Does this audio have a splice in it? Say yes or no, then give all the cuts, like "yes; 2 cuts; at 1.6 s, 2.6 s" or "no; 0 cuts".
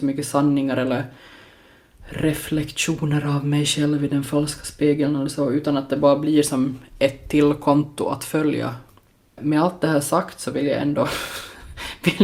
no; 0 cuts